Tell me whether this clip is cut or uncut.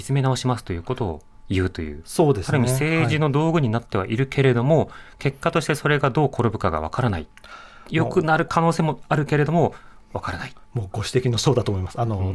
uncut